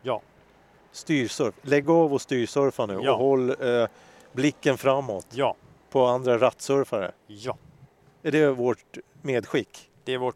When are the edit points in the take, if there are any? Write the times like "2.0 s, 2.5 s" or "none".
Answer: none